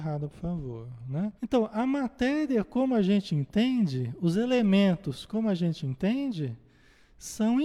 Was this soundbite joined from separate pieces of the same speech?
yes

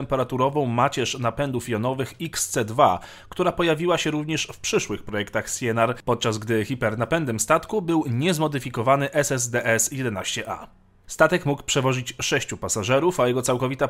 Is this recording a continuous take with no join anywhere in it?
yes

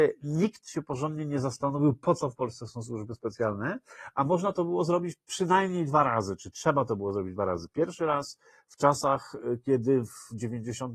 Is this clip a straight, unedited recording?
yes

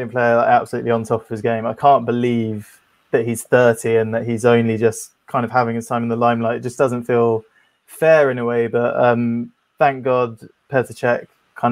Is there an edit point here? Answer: no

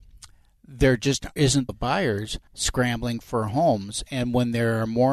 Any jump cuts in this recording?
yes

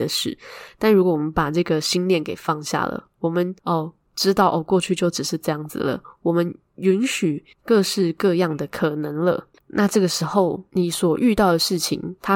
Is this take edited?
yes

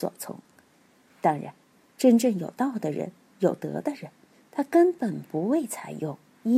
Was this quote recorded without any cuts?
yes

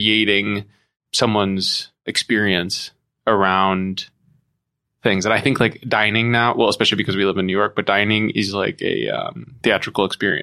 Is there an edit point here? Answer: no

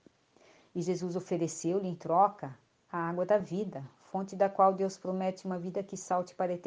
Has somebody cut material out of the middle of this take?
no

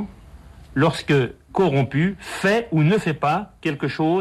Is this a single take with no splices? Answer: no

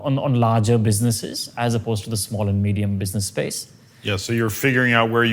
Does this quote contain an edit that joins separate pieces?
no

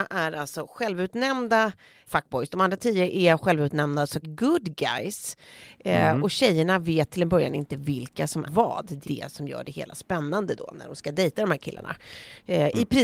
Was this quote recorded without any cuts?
no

